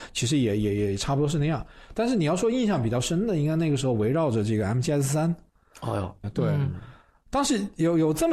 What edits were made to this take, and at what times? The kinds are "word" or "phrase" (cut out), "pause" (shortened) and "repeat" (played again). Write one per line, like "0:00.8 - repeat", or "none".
0:06.2 - phrase